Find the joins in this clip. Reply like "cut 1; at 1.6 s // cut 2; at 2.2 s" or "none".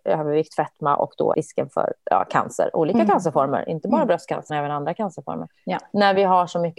cut 1; at 1.3 s // cut 2; at 4.5 s